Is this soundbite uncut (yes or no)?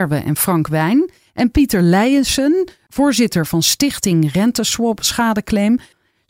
yes